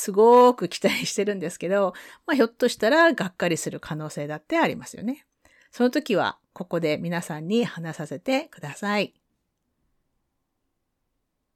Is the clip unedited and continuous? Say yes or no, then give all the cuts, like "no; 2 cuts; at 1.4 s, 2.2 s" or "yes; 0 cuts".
yes; 0 cuts